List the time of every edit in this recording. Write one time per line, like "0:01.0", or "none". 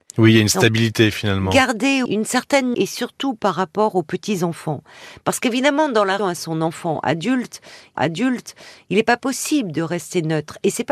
0:02.1
0:02.7
0:06.2
0:08.0